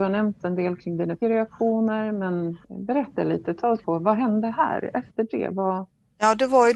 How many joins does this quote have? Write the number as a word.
three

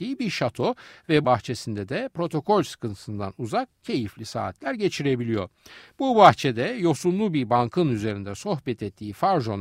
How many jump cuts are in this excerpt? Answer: one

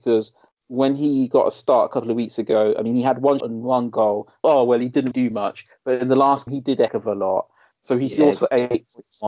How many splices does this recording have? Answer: five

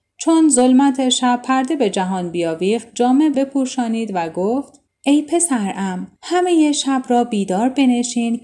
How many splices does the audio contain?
three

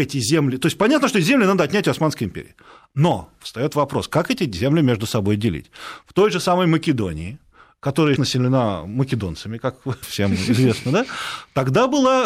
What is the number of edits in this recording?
two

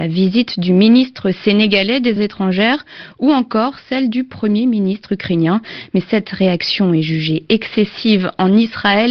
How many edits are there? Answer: one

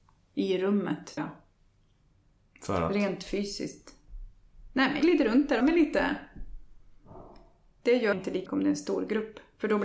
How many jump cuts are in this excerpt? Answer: five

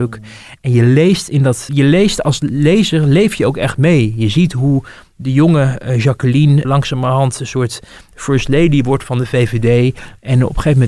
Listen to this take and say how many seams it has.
two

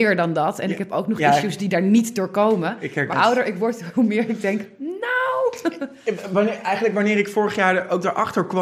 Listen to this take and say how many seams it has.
one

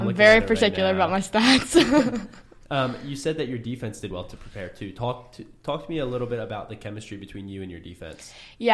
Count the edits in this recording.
one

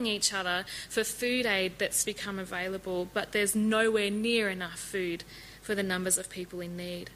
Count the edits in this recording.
one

